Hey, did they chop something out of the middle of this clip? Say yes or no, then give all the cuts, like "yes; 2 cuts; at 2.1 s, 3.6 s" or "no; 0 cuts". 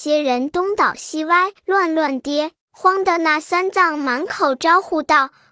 yes; 2 cuts; at 1.6 s, 2.6 s